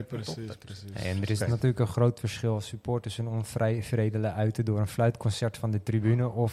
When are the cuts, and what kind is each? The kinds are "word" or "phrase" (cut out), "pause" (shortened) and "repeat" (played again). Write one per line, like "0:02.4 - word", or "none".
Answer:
none